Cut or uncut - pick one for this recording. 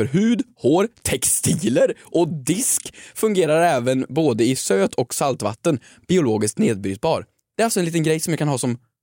uncut